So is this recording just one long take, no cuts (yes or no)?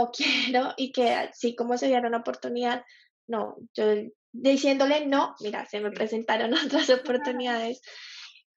yes